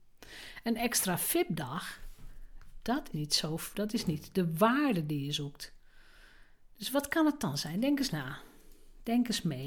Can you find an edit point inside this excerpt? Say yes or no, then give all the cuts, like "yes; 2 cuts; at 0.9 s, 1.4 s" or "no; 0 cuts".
yes; 1 cut; at 3.1 s